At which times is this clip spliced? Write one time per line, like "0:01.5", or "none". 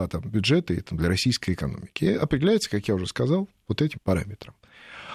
0:03.9